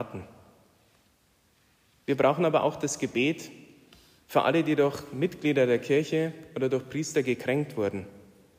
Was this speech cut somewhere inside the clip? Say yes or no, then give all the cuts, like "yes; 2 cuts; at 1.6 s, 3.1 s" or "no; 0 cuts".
no; 0 cuts